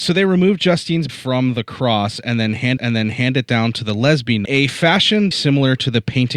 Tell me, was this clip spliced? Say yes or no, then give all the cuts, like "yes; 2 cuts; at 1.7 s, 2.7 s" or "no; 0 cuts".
yes; 4 cuts; at 1.1 s, 2.8 s, 4.4 s, 5.3 s